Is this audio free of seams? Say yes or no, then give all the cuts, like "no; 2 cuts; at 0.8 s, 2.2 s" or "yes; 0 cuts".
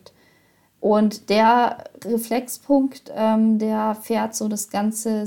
yes; 0 cuts